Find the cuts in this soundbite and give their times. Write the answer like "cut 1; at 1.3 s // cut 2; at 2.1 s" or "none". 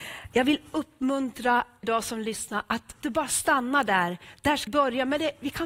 cut 1; at 1.8 s // cut 2; at 3.0 s // cut 3; at 4.7 s